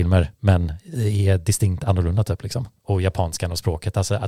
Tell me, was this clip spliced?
yes; 1 cut; at 2.8 s

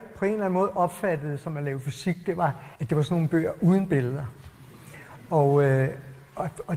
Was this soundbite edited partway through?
yes; 1 cut; at 2.8 s

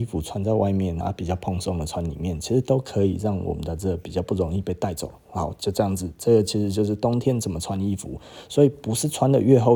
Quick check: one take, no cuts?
no; 1 cut; at 1.0 s

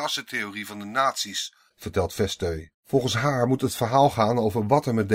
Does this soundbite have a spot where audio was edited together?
yes; 1 cut; at 2.7 s

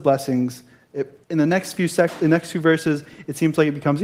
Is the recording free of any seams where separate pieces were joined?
no; 1 cut; at 1.2 s

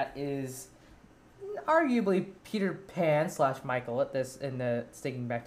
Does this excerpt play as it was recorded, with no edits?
no; 1 cut; at 2.4 s

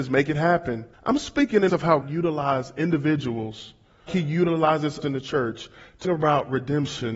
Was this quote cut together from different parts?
yes; 6 cuts; at 0.9 s, 1.7 s, 2.0 s, 4.1 s, 5.0 s, 6.0 s

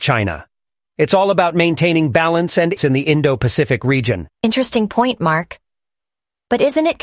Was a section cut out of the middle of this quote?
yes; 2 cuts; at 2.8 s, 4.3 s

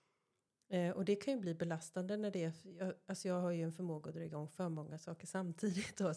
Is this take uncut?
yes; 0 cuts

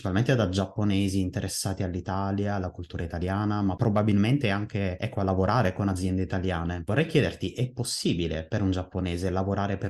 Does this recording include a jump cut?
no; 0 cuts

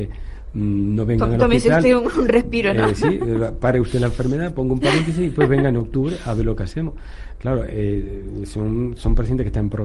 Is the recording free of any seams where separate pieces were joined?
yes; 0 cuts

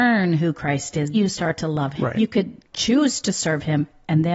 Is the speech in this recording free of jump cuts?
no; 3 cuts; at 1.1 s, 2.0 s, 2.6 s

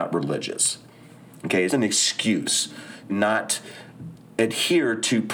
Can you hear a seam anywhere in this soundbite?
yes; 2 cuts; at 1.7 s, 3.1 s

